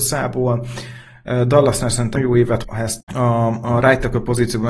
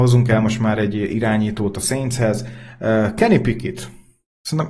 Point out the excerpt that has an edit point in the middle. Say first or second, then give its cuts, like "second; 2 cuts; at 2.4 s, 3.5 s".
first; 3 cuts; at 2.2 s, 2.6 s, 3.0 s